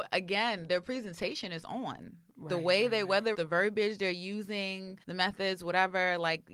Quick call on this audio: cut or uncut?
cut